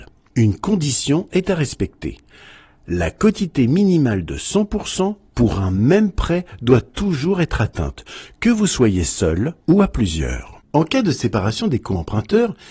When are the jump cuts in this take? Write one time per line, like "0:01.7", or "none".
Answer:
0:09.6